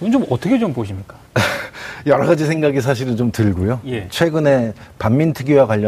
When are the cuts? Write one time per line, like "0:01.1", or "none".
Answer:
0:01.3